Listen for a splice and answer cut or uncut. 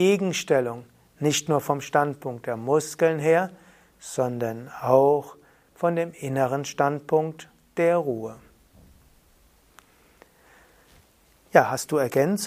uncut